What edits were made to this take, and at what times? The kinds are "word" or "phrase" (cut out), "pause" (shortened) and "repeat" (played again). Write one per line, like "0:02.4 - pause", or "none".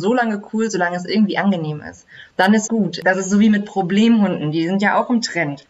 0:02.3 - pause
0:02.7 - word